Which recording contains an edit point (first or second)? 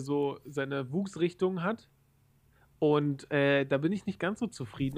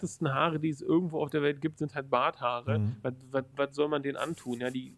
second